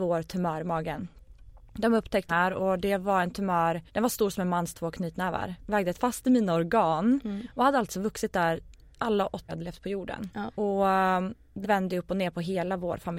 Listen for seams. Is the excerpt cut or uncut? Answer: cut